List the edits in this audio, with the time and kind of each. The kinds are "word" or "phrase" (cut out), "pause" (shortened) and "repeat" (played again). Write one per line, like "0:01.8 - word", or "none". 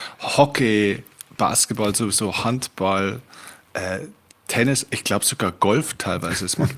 none